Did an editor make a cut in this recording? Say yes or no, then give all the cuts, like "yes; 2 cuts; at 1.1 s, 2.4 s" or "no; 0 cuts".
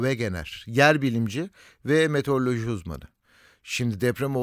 no; 0 cuts